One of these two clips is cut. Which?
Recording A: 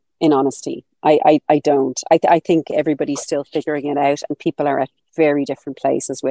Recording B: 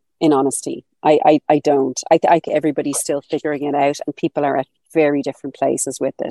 B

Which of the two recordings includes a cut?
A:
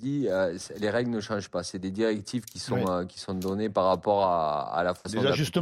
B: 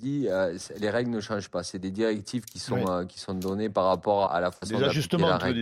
B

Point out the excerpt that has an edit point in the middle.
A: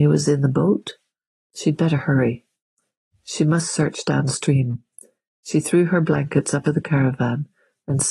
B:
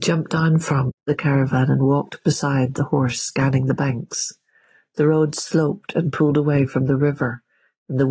A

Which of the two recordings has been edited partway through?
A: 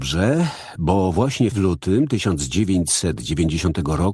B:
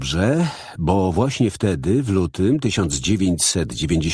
A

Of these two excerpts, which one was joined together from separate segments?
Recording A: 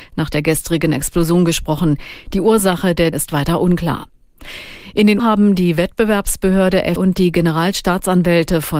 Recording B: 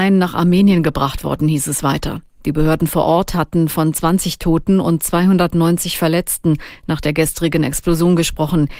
A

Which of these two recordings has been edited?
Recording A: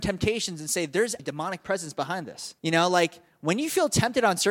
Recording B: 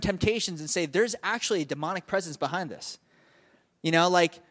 A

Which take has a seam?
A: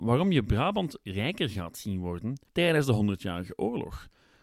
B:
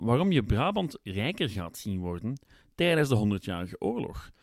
A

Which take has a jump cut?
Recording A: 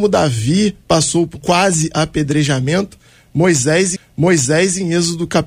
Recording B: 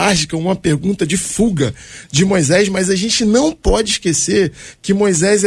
A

